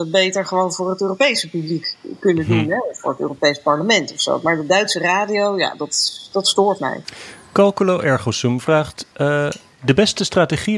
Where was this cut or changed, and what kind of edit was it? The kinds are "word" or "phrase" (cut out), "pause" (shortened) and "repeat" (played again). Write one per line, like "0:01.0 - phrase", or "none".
none